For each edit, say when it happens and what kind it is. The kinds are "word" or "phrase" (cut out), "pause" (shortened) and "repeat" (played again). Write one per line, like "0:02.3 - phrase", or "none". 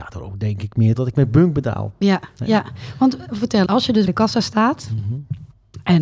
0:01.0 - word
0:03.7 - word
0:04.1 - word